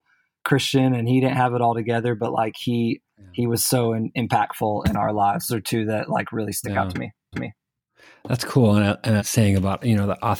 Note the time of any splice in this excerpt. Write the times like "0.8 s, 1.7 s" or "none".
5.5 s, 7.3 s, 9.2 s